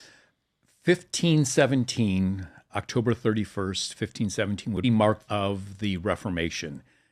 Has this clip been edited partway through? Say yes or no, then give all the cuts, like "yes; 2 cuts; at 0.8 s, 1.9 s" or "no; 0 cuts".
yes; 3 cuts; at 2.7 s, 4.8 s, 5.3 s